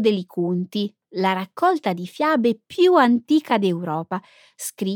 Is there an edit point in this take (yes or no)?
no